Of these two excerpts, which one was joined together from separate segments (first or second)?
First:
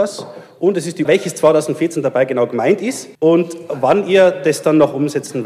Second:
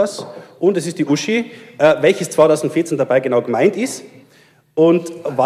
first